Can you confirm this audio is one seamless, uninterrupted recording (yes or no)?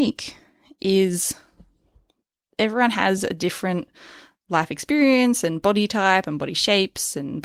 yes